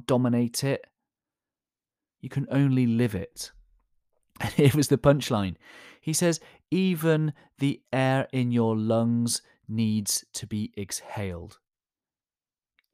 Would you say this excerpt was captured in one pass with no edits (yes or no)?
yes